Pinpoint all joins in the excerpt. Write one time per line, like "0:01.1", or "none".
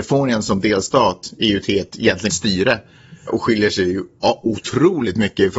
0:02.3
0:03.3